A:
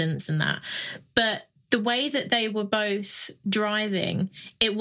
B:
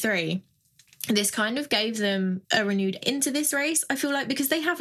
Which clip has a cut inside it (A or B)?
B